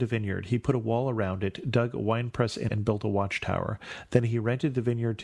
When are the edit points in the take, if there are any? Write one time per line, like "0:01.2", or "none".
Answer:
0:02.7